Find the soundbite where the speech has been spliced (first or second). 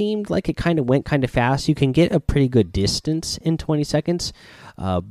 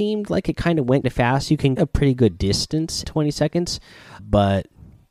second